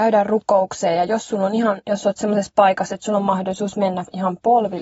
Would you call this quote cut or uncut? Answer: uncut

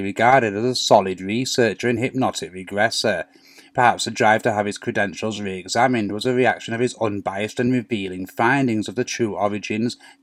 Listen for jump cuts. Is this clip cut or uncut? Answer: uncut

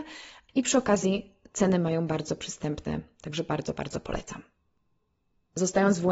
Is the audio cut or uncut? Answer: uncut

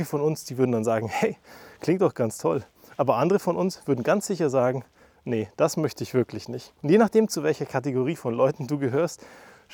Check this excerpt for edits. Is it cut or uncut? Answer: cut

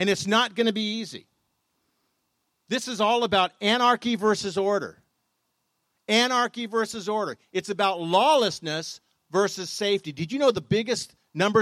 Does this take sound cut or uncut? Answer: uncut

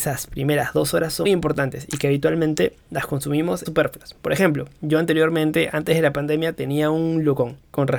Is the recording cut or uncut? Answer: cut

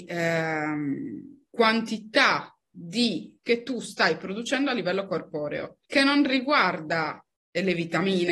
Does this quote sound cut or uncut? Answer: cut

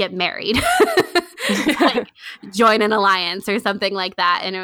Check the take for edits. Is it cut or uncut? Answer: uncut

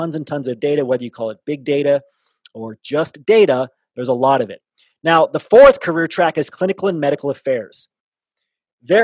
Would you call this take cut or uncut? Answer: uncut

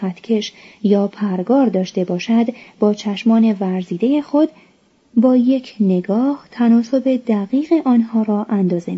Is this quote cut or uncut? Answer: uncut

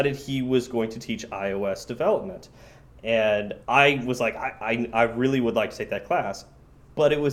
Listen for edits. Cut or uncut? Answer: cut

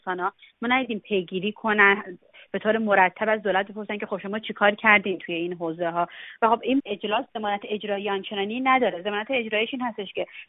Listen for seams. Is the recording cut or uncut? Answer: uncut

